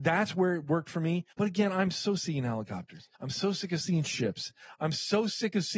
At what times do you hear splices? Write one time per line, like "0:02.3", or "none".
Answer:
0:01.3
0:02.2
0:03.1